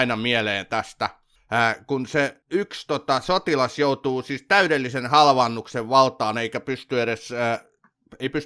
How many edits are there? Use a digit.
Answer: 2